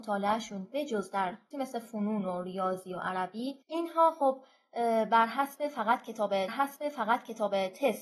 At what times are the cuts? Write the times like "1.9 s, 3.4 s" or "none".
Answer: 1.5 s, 3.6 s, 6.5 s